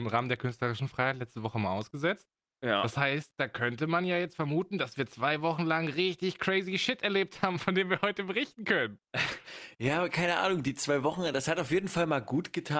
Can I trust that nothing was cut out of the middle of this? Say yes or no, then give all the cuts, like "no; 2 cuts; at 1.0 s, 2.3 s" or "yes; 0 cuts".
yes; 0 cuts